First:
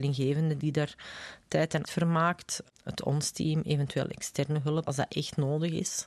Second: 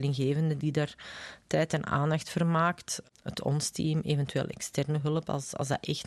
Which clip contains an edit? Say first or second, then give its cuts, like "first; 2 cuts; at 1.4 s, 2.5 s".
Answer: first; 2 cuts; at 1.8 s, 4.9 s